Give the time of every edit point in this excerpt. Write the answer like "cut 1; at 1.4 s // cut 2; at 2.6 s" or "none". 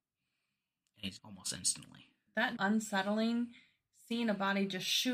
cut 1; at 1.2 s // cut 2; at 2.6 s